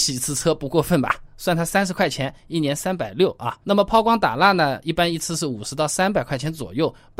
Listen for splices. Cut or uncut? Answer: cut